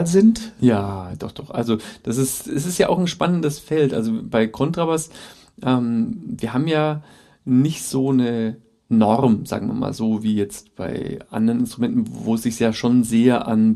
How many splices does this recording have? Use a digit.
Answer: 0